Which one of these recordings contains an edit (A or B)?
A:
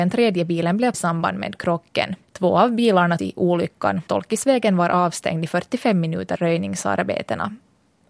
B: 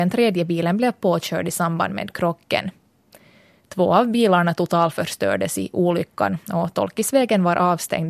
A